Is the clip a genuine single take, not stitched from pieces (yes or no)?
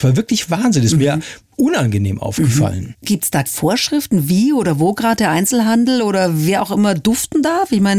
no